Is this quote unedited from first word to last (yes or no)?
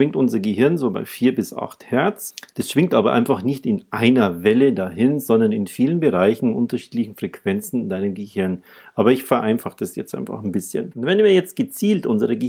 yes